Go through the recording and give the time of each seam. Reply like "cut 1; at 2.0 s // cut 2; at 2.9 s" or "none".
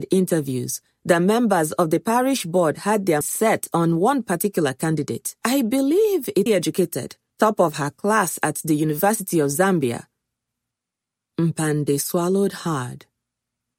cut 1; at 3.2 s // cut 2; at 5.4 s // cut 3; at 6.5 s // cut 4; at 7.3 s